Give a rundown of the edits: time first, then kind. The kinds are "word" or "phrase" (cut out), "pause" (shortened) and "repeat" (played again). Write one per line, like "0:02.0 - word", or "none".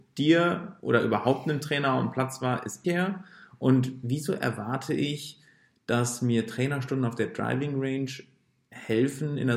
0:02.8 - word